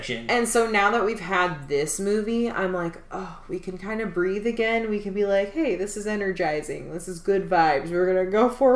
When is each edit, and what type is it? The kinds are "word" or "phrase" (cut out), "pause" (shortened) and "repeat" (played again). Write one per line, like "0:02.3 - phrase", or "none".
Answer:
none